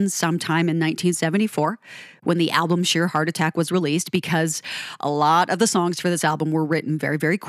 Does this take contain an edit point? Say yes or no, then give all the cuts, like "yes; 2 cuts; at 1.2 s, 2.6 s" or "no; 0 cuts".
no; 0 cuts